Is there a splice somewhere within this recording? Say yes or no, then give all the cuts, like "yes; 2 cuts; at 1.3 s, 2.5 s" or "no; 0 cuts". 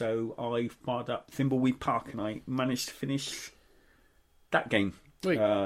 no; 0 cuts